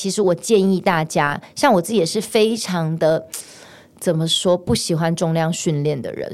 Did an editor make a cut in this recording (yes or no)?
no